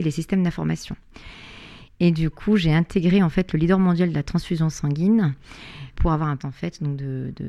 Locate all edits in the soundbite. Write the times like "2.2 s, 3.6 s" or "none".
5.9 s, 6.4 s